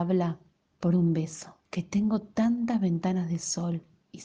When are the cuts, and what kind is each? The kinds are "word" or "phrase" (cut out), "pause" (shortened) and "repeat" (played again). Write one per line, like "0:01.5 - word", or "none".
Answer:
0:01.6 - pause